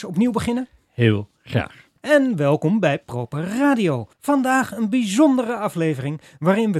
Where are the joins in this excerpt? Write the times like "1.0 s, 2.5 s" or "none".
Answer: 2.0 s, 4.1 s